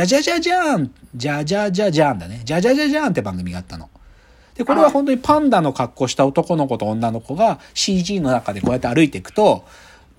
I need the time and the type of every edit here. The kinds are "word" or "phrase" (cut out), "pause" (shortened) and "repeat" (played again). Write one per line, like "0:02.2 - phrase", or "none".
none